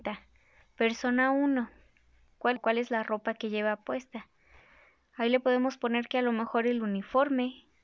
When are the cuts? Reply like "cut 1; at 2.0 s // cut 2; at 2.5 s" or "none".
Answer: cut 1; at 2.6 s